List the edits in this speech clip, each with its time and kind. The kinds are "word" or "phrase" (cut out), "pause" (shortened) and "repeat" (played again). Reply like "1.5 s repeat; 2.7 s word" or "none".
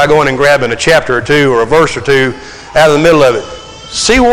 none